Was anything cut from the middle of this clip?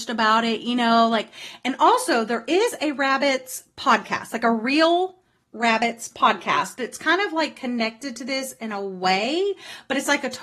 no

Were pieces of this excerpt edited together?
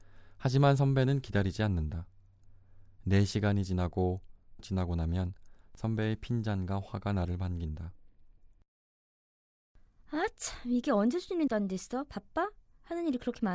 yes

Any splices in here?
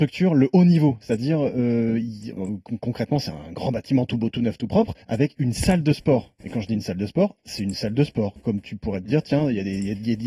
yes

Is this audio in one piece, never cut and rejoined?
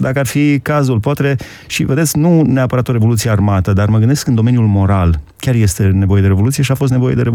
yes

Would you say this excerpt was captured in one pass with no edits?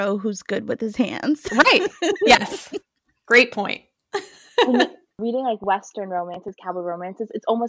yes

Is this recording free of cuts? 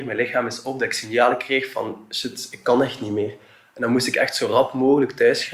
yes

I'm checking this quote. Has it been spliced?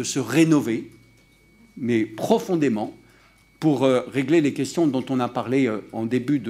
no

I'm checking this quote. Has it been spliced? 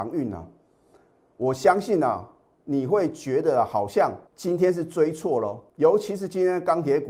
yes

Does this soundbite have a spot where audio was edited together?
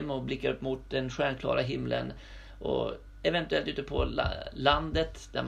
no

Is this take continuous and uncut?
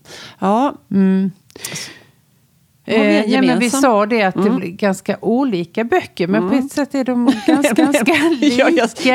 no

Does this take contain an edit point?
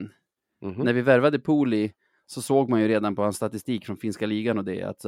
no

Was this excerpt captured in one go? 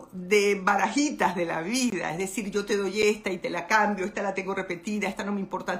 yes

